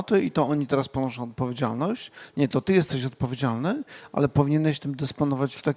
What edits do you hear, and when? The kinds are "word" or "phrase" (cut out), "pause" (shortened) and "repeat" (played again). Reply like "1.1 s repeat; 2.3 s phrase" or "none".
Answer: none